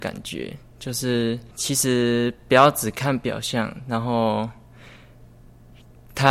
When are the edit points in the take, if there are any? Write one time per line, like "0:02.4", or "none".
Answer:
0:01.5